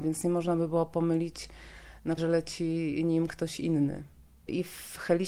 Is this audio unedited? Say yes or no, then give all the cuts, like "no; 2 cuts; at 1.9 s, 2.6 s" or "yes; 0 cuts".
no; 1 cut; at 2.2 s